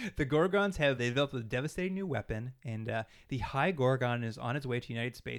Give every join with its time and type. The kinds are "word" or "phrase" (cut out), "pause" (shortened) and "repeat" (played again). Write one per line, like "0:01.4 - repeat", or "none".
0:01.0 - word